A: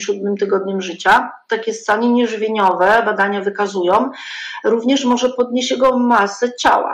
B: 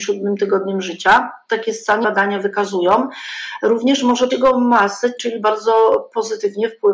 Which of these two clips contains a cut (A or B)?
B